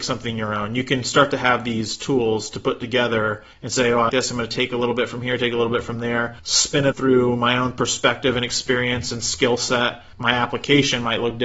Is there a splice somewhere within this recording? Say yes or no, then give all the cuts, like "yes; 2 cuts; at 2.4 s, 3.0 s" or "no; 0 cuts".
yes; 5 cuts; at 3.5 s, 4.1 s, 6.4 s, 6.9 s, 10.1 s